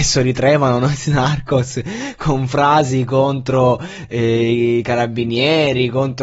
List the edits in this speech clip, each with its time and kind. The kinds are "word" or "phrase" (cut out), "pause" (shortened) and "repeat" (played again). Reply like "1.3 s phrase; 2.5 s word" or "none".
none